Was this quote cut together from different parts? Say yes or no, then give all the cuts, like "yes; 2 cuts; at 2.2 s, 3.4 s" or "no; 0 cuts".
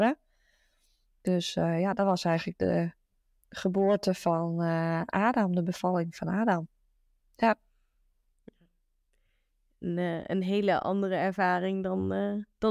no; 0 cuts